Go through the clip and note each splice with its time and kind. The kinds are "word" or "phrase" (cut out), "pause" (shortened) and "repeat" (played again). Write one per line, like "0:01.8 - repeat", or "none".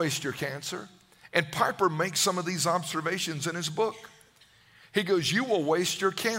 none

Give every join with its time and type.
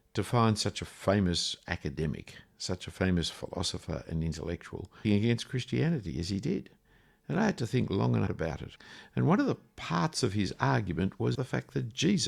0:05.0 - word
0:08.3 - word
0:11.3 - word

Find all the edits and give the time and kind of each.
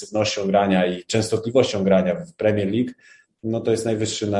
none

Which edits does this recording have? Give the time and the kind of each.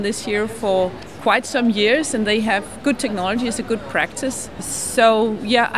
none

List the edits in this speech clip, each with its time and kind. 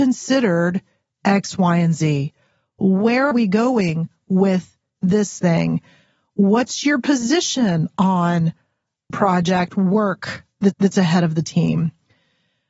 0:03.3 - word
0:05.4 - word
0:09.1 - word
0:10.7 - repeat

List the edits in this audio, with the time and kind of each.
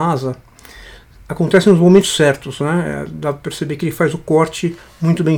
none

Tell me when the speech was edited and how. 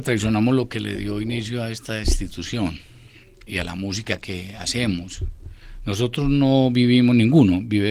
0:03.5 - word

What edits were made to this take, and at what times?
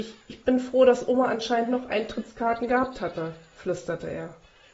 none

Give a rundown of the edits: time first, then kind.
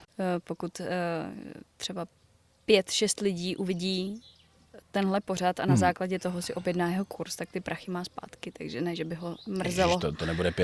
none

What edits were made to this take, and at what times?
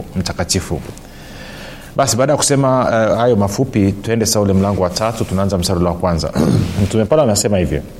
none

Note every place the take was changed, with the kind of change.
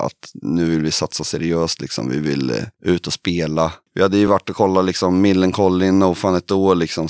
none

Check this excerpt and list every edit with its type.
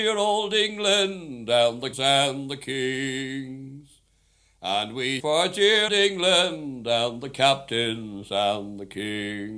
0:01.9 - word
0:05.2 - word
0:05.9 - word

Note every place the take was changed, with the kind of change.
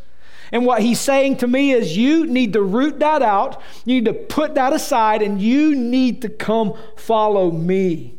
none

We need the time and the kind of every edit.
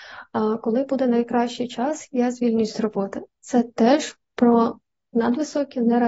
none

